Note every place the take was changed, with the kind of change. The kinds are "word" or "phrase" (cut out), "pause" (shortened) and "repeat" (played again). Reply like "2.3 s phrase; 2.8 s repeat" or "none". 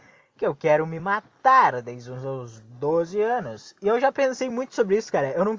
none